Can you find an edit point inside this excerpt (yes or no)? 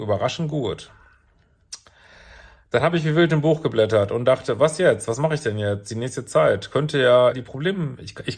yes